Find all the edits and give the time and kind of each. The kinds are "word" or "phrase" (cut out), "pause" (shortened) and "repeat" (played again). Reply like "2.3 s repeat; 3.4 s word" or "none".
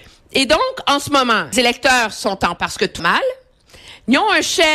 1.5 s word; 2.6 s word; 3.0 s word

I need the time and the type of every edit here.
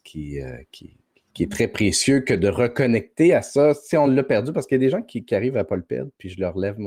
none

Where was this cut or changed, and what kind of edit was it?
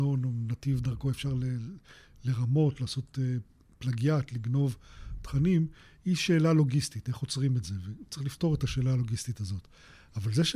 none

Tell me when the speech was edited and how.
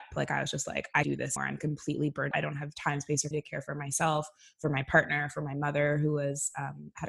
1.0 s word; 1.4 s word; 2.3 s word; 3.3 s word

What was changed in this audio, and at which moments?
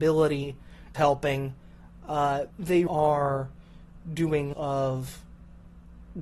0.9 s word; 2.5 s word; 2.9 s word; 4.5 s word

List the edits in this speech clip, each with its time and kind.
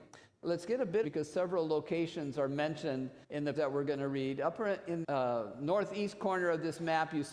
1.0 s phrase; 3.2 s pause; 3.6 s word; 5.0 s phrase

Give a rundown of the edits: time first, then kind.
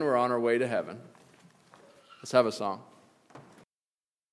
none

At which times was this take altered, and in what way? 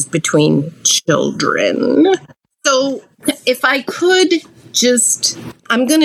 none

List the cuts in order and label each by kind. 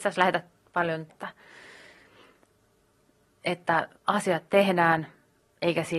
1.1 s word; 4.0 s pause

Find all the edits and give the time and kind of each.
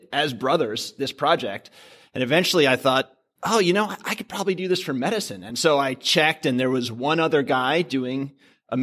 none

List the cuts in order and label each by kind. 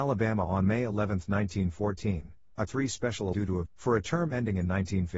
2.7 s word; 3.3 s word; 3.7 s word

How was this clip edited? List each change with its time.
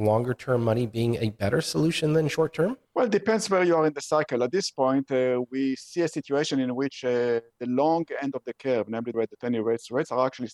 9.1 s phrase

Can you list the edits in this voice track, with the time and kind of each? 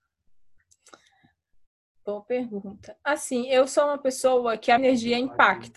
4.8 s word

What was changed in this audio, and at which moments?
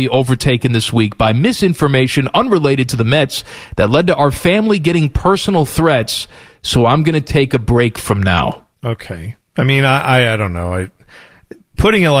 8.7 s pause

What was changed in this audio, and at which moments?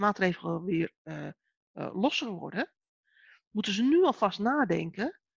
none

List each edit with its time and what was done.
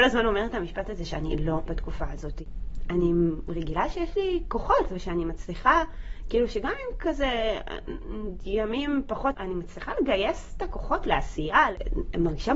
1.7 s phrase; 9.3 s phrase

